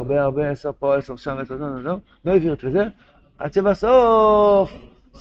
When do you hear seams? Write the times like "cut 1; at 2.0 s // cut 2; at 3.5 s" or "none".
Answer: none

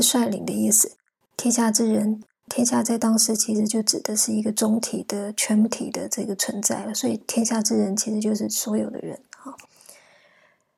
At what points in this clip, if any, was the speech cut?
none

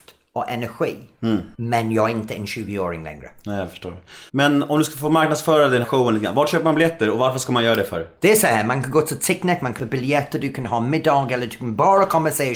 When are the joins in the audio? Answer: cut 1; at 1.5 s // cut 2; at 4.3 s // cut 3; at 5.8 s // cut 4; at 9.8 s

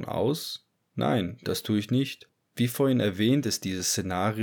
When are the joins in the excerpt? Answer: none

